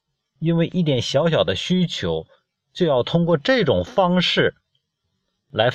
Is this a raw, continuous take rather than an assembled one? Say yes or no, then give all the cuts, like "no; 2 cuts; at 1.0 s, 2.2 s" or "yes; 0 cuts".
yes; 0 cuts